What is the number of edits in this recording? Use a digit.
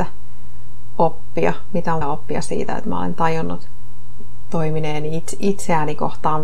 1